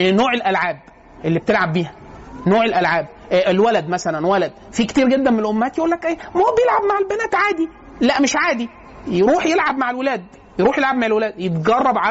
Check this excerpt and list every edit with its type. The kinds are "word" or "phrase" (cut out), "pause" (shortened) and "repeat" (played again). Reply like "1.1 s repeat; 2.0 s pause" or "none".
none